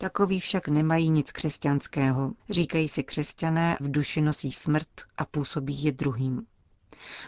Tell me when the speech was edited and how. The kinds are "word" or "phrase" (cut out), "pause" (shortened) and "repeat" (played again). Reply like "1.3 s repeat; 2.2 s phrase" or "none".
2.4 s pause; 3.8 s word; 5.1 s pause